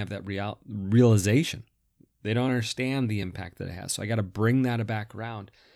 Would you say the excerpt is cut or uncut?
uncut